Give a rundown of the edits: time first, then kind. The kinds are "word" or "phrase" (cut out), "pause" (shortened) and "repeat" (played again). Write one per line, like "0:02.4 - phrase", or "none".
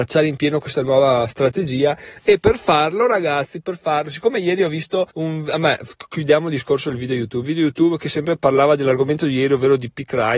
0:05.1 - pause

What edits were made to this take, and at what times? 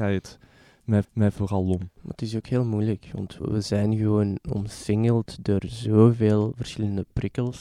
0:01.0 - repeat
0:02.0 - pause
0:03.4 - word

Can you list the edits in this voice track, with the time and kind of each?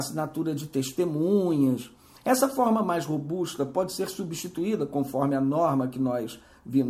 none

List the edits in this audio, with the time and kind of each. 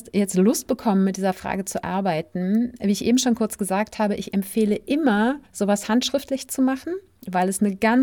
0:05.5 - pause

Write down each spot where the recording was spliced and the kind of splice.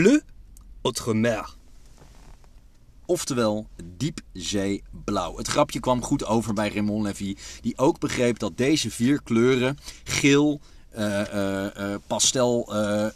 none

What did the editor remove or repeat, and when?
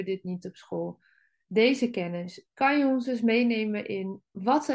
none

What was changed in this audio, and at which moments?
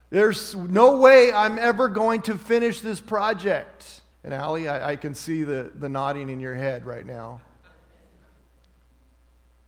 0:04.1 - pause

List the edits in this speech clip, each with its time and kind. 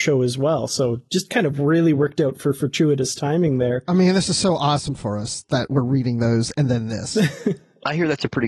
0:01.1 - pause

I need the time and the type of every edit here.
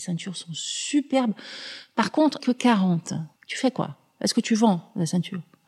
0:02.4 - phrase
0:03.4 - pause

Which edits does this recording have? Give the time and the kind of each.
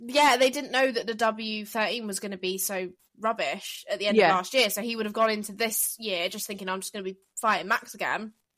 none

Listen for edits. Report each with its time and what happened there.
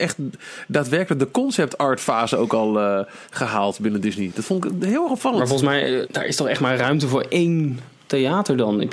0:06.1 - word

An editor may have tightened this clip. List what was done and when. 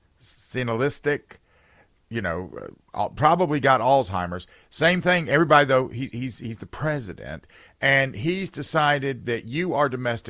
none

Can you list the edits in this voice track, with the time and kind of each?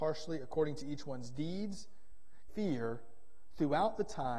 0:02.5 - phrase

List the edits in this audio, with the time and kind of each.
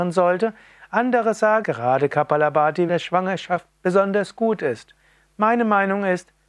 0:01.6 - word
0:02.9 - word

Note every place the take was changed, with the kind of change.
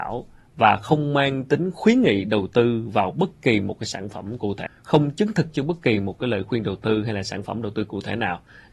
0:04.7 - word

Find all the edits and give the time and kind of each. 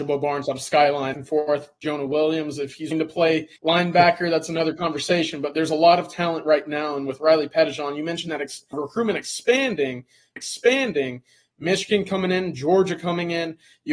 0:01.1 - phrase
0:02.9 - word
0:03.6 - pause
0:08.7 - word
0:10.4 - repeat

